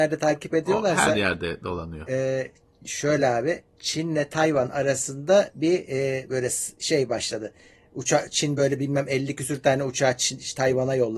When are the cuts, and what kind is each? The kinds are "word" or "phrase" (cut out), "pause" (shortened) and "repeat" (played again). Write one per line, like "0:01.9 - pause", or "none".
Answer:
none